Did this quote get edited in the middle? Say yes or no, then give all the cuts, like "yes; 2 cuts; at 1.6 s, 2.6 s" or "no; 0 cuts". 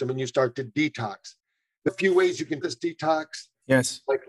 yes; 2 cuts; at 1.9 s, 2.6 s